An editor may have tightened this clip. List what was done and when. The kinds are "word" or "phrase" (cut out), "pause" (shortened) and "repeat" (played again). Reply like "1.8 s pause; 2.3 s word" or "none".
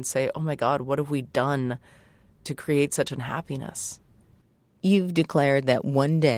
none